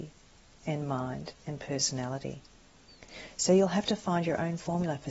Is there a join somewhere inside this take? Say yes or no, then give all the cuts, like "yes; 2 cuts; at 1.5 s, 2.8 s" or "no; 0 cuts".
no; 0 cuts